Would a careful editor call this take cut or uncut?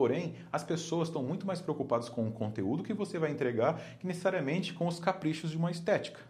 uncut